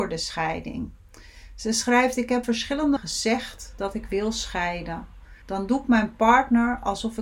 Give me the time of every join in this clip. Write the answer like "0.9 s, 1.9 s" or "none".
2.4 s, 3.0 s, 5.4 s